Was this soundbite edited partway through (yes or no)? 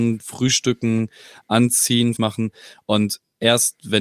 yes